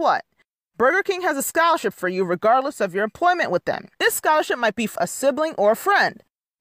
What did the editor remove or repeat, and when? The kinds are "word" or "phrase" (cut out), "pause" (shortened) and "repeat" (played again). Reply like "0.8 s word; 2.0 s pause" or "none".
3.9 s pause; 5.0 s word

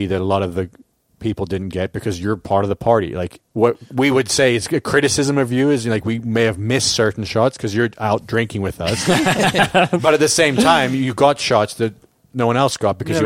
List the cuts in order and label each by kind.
3.5 s pause

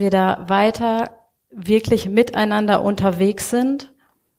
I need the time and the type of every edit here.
none

